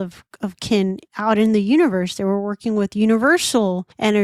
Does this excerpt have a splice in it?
no; 0 cuts

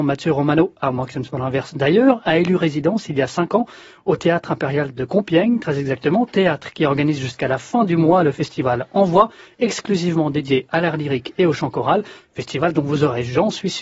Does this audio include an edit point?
no; 0 cuts

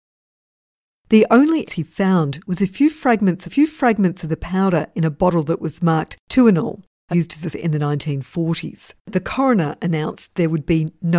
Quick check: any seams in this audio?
yes; 5 cuts; at 1.7 s, 3.5 s, 7.1 s, 7.5 s, 9.0 s

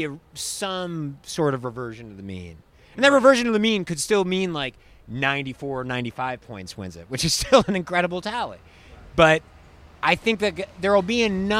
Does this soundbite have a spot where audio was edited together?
no; 0 cuts

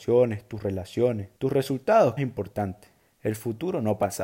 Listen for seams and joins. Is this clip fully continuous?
no; 3 cuts; at 1.4 s, 2.2 s, 3.0 s

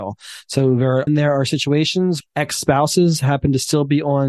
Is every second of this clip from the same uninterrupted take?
no; 2 cuts; at 1.1 s, 2.2 s

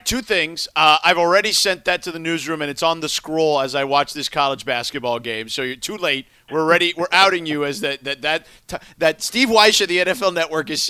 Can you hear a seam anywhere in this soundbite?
no; 0 cuts

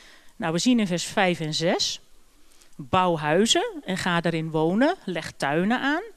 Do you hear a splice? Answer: no; 0 cuts

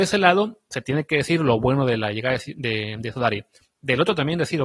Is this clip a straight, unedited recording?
yes; 0 cuts

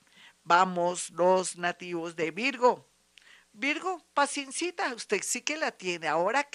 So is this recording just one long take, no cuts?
yes; 0 cuts

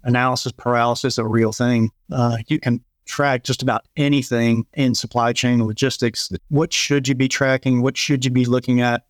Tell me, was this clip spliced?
yes; 2 cuts; at 4.7 s, 6.4 s

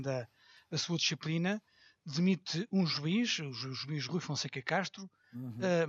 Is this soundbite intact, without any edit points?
yes; 0 cuts

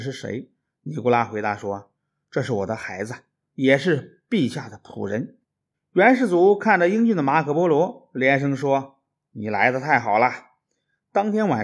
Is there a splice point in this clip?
yes; 1 cut; at 5.4 s

